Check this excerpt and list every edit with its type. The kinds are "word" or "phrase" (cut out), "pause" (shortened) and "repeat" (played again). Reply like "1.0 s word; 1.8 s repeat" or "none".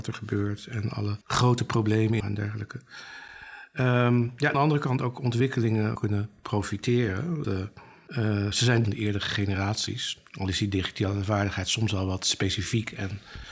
1.2 s pause; 2.2 s phrase; 4.5 s phrase; 6.0 s phrase; 7.4 s phrase; 8.8 s phrase